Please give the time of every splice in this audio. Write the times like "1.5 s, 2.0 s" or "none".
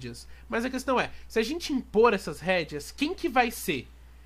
none